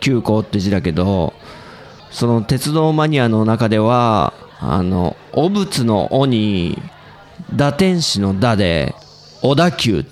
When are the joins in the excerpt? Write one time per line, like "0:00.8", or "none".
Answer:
0:02.0
0:04.5
0:09.0